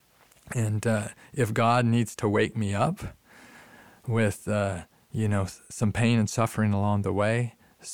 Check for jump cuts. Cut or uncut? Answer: uncut